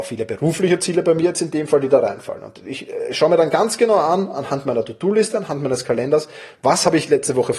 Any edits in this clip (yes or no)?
no